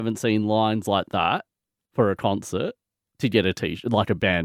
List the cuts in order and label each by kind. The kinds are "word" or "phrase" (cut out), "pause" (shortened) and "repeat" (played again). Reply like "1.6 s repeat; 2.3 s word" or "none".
none